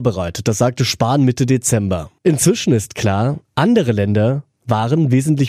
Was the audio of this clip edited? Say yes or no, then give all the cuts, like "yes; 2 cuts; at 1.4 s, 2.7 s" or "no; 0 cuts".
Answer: yes; 1 cut; at 2.2 s